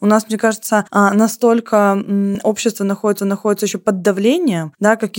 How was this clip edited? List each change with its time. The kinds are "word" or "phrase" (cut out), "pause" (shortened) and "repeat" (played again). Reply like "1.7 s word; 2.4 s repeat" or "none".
3.2 s repeat